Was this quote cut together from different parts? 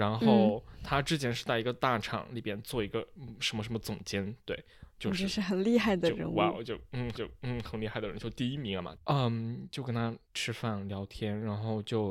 yes; 2 cuts; at 7.1 s, 10.2 s

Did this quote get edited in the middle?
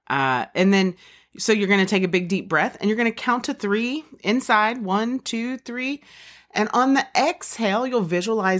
no; 0 cuts

